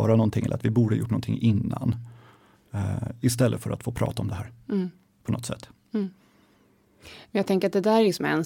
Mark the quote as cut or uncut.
uncut